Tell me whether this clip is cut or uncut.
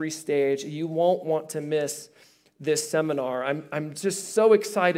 uncut